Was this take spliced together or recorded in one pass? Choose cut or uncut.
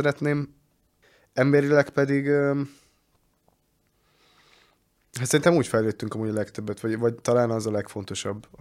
uncut